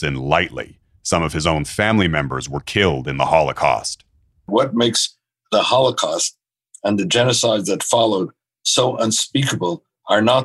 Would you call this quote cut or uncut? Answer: uncut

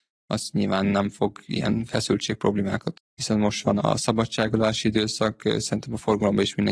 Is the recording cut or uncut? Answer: cut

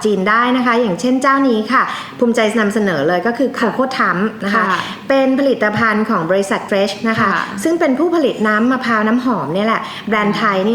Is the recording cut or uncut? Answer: cut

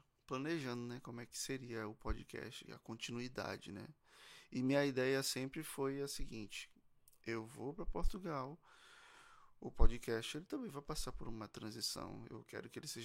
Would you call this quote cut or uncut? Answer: cut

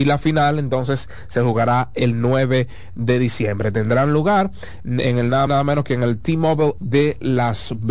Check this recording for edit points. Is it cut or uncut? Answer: cut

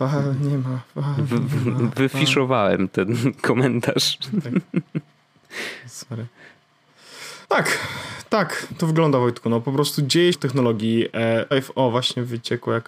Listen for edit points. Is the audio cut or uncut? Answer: cut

